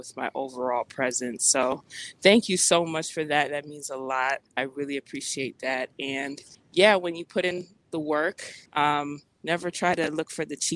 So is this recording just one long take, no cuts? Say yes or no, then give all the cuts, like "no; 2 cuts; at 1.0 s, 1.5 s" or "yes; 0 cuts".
no; 3 cuts; at 4.5 s, 6.5 s, 8.7 s